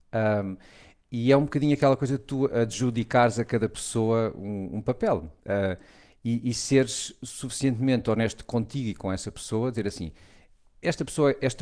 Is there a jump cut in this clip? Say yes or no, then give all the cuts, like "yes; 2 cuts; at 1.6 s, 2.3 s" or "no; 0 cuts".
yes; 1 cut; at 5.4 s